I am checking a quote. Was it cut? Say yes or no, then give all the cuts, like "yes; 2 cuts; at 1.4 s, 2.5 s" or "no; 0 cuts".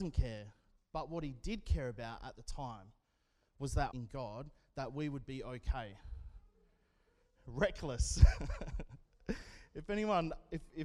yes; 1 cut; at 3.9 s